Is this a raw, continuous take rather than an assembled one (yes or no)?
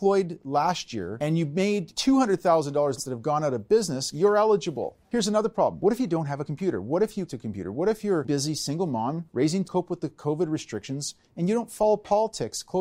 no